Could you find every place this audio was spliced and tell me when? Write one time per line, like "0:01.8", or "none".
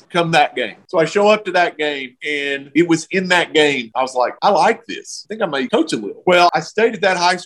none